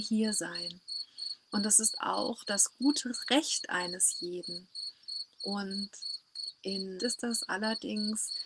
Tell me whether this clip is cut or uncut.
cut